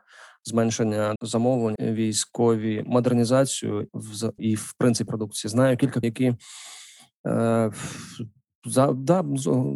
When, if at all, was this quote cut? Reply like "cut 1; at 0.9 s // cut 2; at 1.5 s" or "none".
cut 1; at 1.2 s // cut 2; at 1.8 s // cut 3; at 3.9 s // cut 4; at 4.4 s // cut 5; at 5.1 s // cut 6; at 6.0 s